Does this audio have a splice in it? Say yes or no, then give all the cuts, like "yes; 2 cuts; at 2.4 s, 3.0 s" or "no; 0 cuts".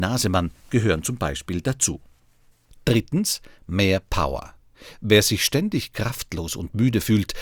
no; 0 cuts